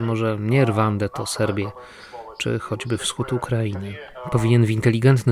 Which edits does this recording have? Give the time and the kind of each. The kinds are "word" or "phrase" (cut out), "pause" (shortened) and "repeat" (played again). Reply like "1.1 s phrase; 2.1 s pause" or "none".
none

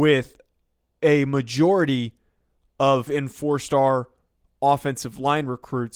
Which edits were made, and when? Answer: 3.1 s word

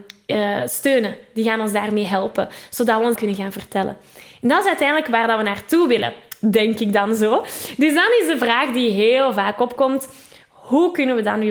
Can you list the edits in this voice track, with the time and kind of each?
3.2 s phrase

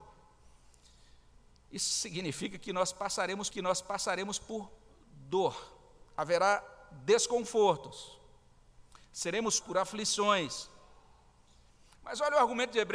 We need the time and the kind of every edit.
3.5 s repeat; 6.1 s pause; 9.6 s word

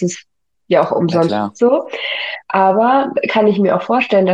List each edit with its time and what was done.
1.3 s phrase

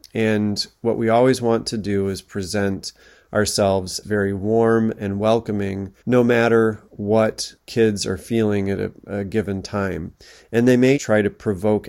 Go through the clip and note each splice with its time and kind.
4.0 s word; 6.0 s pause; 10.9 s word

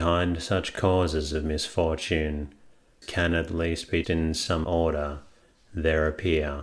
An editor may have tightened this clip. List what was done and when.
3.0 s word; 4.0 s word; 4.6 s word

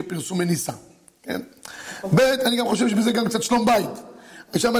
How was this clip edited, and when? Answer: none

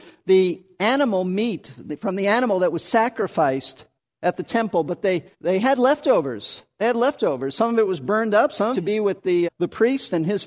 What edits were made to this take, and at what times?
4.0 s pause; 5.3 s pause; 8.7 s phrase; 9.4 s word

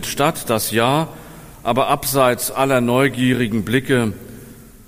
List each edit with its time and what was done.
none

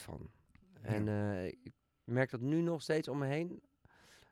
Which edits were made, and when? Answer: none

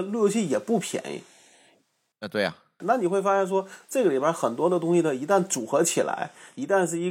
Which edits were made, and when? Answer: none

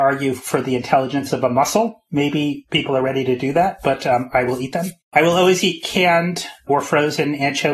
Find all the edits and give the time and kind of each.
5.0 s pause

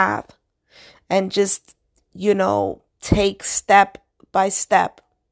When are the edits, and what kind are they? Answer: 2.9 s pause

